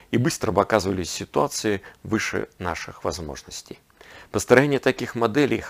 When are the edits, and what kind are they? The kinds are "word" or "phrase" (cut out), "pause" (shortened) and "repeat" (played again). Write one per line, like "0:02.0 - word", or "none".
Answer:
none